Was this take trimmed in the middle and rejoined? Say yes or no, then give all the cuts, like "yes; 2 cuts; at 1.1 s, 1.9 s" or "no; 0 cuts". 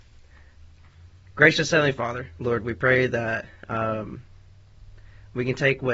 no; 0 cuts